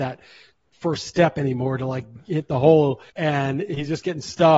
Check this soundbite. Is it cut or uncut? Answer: cut